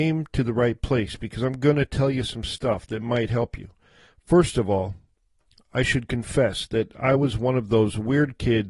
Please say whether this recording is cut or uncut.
uncut